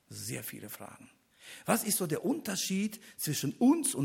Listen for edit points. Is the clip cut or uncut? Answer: uncut